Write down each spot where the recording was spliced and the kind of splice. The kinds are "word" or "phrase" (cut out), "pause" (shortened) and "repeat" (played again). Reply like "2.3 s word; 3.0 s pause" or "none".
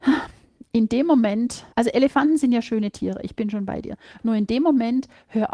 1.7 s pause